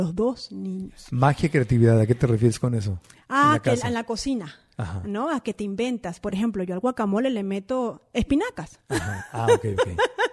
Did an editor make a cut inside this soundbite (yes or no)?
no